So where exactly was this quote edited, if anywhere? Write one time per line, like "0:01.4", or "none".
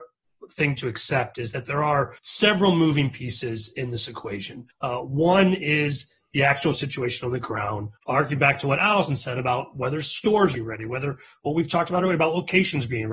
0:02.2
0:04.7
0:08.0
0:10.5